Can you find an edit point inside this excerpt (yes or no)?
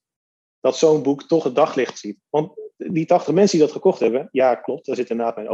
no